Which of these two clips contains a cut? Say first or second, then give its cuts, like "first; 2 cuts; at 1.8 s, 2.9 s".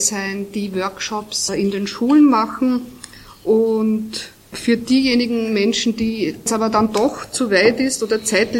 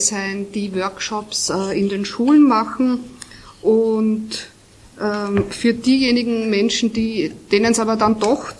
first; 3 cuts; at 1.5 s, 4.5 s, 6.5 s